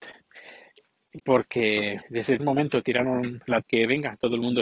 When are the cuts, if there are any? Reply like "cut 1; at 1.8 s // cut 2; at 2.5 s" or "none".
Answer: cut 1; at 2.0 s // cut 2; at 2.4 s // cut 3; at 3.6 s